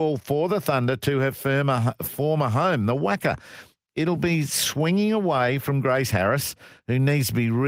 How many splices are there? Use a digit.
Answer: 0